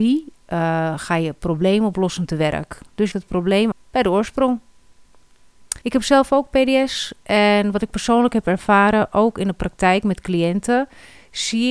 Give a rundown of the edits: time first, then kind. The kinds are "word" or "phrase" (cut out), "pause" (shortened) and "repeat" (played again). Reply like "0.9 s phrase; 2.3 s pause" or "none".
3.1 s phrase; 3.7 s word; 5.8 s pause